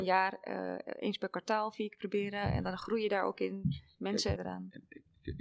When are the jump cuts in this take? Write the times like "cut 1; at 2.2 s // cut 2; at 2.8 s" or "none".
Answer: cut 1; at 4.4 s